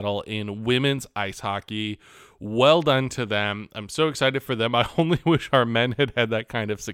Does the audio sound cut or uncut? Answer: uncut